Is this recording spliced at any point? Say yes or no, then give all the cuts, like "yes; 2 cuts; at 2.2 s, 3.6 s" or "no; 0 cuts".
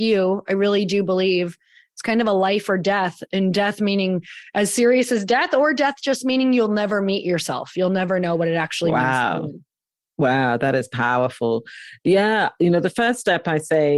no; 0 cuts